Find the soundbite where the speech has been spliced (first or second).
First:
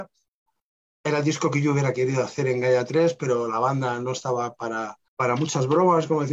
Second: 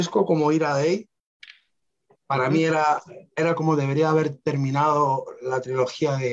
first